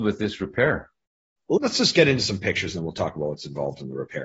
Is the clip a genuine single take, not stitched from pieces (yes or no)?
yes